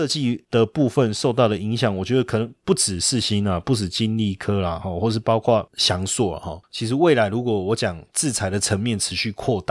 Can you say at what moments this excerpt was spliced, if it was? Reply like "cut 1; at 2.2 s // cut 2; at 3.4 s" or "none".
none